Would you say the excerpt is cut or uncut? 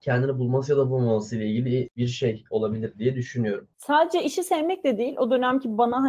cut